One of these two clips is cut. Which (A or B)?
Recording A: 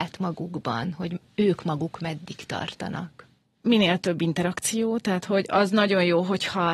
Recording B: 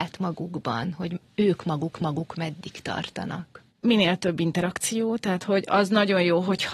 B